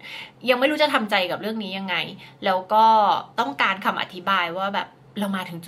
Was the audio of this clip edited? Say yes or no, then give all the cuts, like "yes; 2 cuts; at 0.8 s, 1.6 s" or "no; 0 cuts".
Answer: yes; 1 cut; at 3.3 s